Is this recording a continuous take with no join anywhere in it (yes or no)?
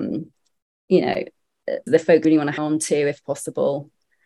no